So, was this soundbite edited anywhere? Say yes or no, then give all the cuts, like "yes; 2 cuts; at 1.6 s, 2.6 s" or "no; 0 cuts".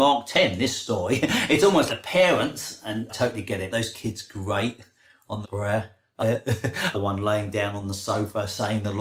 yes; 6 cuts; at 1.9 s, 3.1 s, 3.7 s, 5.4 s, 6.2 s, 6.9 s